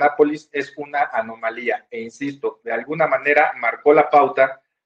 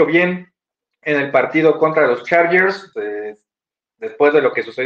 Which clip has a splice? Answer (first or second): second